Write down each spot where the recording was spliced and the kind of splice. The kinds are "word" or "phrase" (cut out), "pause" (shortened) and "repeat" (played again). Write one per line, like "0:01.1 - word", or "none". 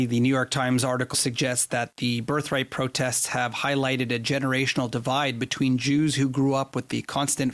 0:01.1 - word